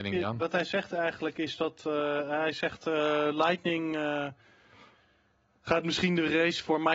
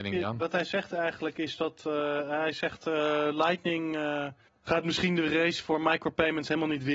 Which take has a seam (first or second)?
second